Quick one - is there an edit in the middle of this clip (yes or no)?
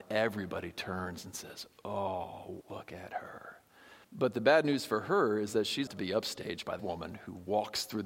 yes